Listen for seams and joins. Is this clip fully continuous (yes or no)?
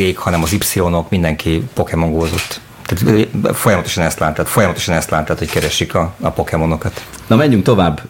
no